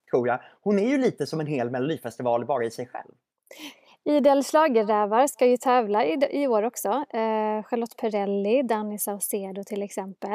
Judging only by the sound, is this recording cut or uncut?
uncut